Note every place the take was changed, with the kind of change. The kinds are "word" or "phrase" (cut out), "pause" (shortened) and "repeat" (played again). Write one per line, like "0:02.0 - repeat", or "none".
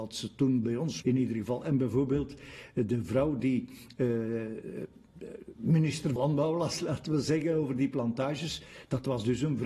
0:01.0 - word
0:06.2 - word